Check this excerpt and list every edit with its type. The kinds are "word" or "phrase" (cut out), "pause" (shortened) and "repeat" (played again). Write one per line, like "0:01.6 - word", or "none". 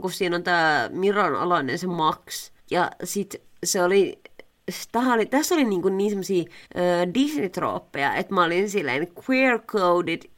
0:02.6 - pause
0:06.6 - pause